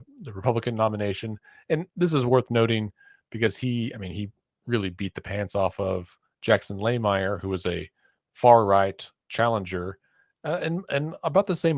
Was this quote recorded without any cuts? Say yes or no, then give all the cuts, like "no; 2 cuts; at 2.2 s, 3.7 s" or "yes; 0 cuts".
yes; 0 cuts